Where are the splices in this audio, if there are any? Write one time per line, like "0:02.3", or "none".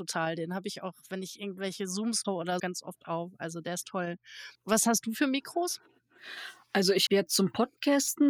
0:02.2
0:02.6
0:04.5
0:07.1